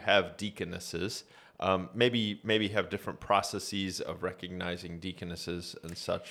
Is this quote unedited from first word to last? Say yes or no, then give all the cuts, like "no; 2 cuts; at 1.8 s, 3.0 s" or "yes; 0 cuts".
yes; 0 cuts